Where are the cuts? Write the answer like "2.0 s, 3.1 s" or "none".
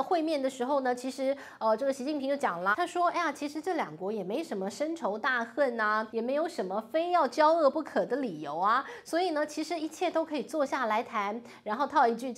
2.7 s, 6.1 s